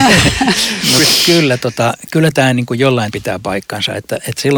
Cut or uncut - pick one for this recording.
cut